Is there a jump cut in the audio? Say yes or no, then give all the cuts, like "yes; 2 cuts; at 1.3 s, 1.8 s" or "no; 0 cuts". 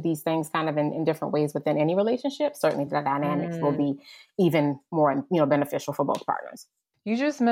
no; 0 cuts